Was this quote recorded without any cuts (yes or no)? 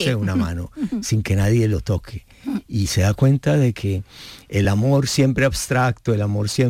yes